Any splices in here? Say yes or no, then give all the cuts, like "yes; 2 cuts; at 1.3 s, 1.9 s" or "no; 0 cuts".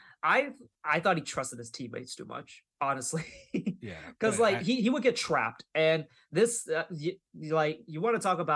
no; 0 cuts